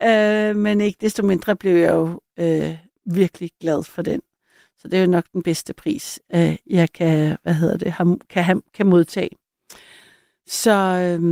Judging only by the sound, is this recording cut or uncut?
uncut